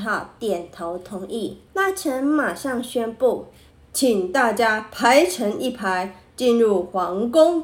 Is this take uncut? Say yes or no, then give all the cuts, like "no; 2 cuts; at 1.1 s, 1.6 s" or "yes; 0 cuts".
no; 2 cuts; at 1.7 s, 3.7 s